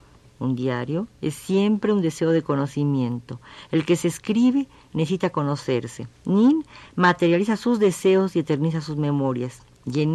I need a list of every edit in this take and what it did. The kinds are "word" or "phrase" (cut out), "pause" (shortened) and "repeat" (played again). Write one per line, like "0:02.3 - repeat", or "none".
none